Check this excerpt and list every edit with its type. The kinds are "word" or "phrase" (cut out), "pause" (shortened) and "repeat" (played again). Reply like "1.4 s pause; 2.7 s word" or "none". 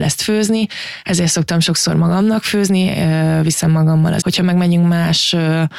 4.2 s word